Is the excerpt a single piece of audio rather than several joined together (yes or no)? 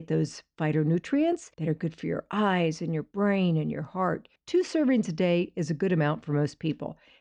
no